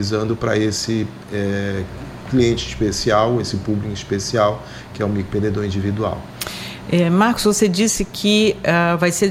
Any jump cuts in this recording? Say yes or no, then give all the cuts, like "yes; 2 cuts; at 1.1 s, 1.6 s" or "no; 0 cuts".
no; 0 cuts